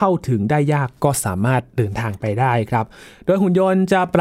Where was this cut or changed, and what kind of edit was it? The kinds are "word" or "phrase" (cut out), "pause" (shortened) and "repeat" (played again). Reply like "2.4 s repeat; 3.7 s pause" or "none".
none